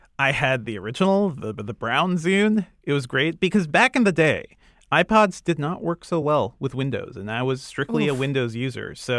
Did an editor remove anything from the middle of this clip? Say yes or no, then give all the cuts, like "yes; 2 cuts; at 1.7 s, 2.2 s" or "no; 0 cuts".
no; 0 cuts